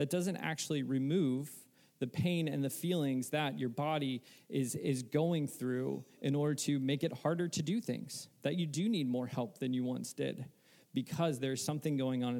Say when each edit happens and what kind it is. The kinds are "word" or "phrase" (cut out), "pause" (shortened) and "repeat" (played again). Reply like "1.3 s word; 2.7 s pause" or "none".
none

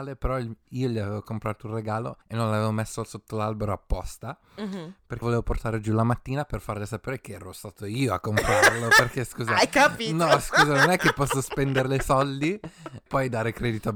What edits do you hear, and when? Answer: 2.2 s pause; 5.2 s word; 13.1 s word

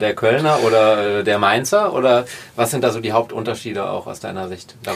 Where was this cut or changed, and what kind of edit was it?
none

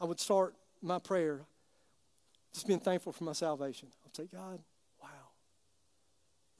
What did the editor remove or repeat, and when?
4.7 s pause

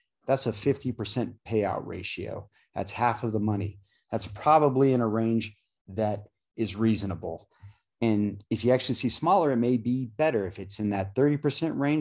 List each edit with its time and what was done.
none

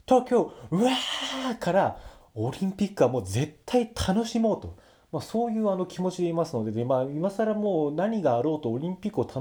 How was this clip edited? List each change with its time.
none

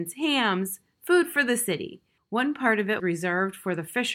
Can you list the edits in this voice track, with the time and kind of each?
2.2 s pause; 3.0 s word

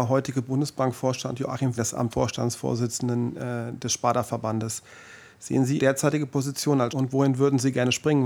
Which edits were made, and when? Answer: 1.8 s word; 2.1 s word; 5.8 s word; 6.9 s word

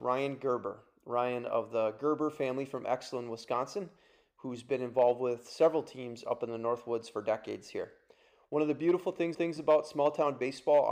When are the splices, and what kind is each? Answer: 9.3 s repeat

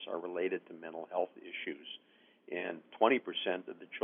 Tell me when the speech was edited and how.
none

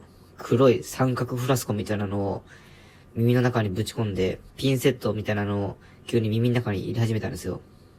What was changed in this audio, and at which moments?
4.5 s word

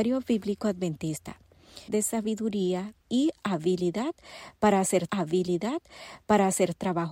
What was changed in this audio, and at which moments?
1.9 s phrase; 3.0 s word; 5.1 s repeat

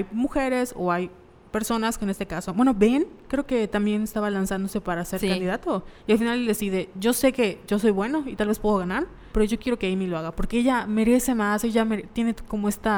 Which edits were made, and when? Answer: 6.0 s pause; 9.3 s pause

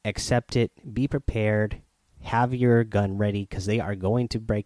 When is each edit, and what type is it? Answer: none

